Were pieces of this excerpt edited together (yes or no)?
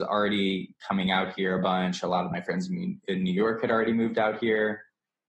no